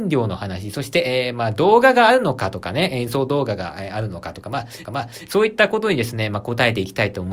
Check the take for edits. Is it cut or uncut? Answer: cut